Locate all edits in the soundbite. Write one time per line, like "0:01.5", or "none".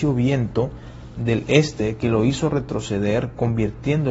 0:01.1